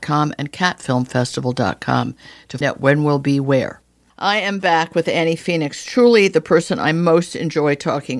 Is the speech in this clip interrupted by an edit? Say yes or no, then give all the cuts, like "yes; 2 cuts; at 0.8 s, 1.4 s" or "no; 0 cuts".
yes; 1 cut; at 2.6 s